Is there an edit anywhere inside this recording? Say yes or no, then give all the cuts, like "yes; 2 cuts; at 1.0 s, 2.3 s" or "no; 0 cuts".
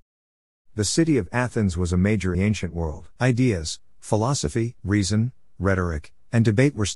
yes; 3 cuts; at 2.3 s, 3.2 s, 4.8 s